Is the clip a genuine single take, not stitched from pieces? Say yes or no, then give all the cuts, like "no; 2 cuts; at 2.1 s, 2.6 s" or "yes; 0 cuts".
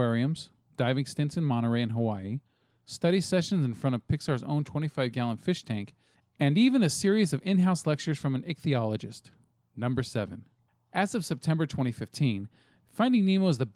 yes; 0 cuts